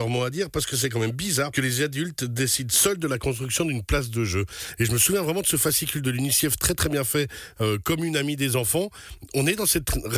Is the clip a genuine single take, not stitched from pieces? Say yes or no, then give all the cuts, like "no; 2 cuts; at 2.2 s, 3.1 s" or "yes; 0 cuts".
no; 1 cut; at 1.5 s